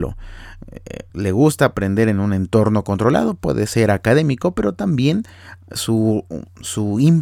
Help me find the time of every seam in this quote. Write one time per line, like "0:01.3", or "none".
0:01.1